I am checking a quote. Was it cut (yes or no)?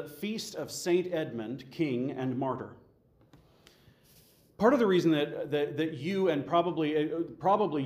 no